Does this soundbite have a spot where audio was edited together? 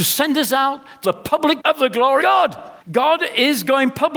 yes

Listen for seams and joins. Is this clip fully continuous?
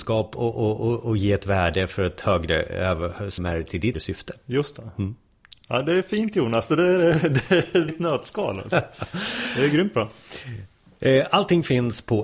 no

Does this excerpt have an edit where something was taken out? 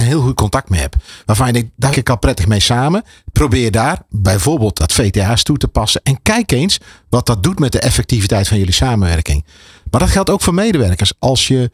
yes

